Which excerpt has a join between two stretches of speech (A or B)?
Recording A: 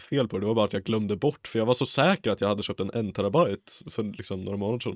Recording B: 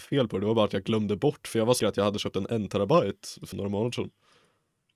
B